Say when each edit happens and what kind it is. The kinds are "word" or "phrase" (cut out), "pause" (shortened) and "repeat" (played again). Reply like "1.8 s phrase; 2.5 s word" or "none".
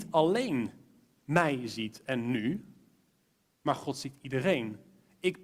none